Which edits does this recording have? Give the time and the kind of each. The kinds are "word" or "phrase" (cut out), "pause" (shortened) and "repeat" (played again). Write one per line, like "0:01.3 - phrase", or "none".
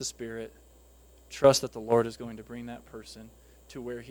none